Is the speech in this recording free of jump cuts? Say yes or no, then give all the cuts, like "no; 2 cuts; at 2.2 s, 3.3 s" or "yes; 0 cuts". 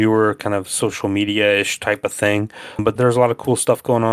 yes; 0 cuts